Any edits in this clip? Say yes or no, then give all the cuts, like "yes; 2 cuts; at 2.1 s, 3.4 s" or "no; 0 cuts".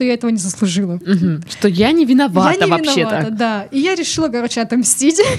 no; 0 cuts